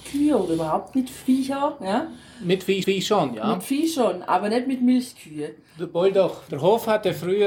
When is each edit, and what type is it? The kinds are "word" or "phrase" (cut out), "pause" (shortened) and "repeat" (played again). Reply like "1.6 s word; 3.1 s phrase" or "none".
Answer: 2.8 s repeat; 6.5 s phrase